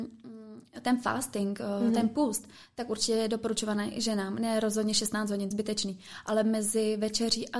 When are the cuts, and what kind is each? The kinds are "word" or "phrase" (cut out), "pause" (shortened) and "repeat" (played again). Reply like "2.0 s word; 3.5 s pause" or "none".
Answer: 5.5 s phrase